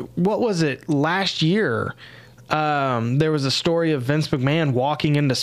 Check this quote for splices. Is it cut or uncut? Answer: uncut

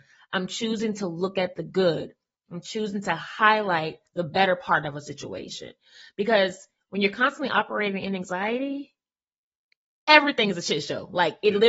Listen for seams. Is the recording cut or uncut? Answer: uncut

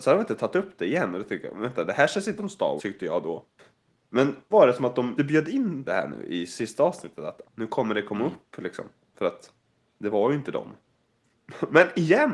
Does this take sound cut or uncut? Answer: cut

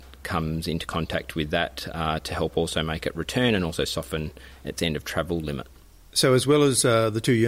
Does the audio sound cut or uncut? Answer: uncut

